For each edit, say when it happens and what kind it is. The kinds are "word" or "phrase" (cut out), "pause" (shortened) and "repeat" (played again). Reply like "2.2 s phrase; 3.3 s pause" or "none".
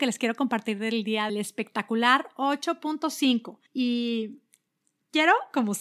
1.3 s phrase; 3.7 s pause

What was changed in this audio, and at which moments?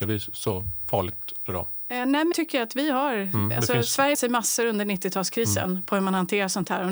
1.5 s word; 2.3 s word; 4.1 s word

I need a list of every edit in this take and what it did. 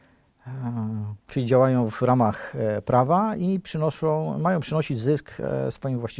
1.2 s pause

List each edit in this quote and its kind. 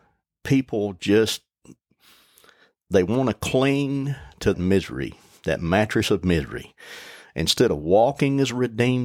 4.5 s word

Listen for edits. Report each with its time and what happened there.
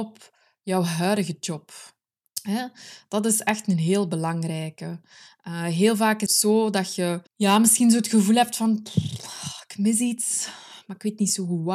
2.2 s pause; 6.3 s word; 7.3 s pause

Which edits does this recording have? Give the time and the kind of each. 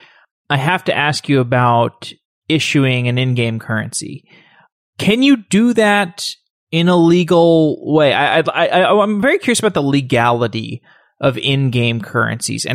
none

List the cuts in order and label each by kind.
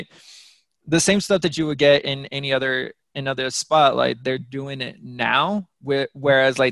none

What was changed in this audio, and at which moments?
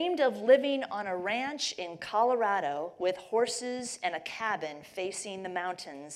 none

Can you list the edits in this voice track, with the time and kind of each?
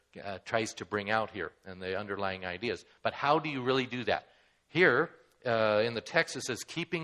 none

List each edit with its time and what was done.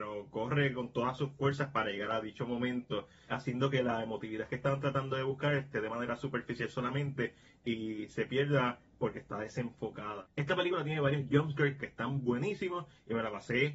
none

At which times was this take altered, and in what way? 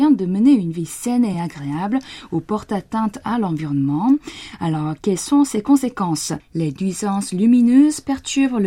none

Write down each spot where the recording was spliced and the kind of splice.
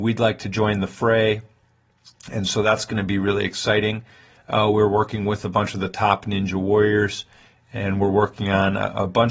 none

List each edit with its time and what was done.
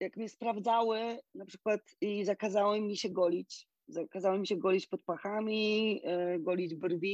none

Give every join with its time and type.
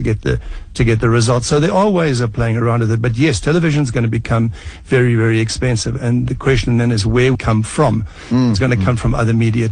7.3 s phrase

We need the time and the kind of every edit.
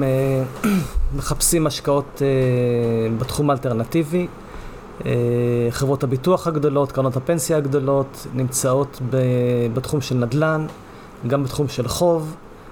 none

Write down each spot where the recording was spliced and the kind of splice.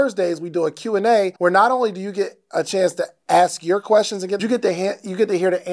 1.4 s pause; 4.4 s phrase

